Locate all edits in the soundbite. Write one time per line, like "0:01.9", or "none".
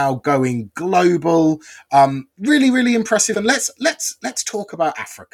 0:02.3
0:03.3